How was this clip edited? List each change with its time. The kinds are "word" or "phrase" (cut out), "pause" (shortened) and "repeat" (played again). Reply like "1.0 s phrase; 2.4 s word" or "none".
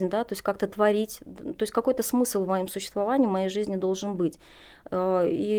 none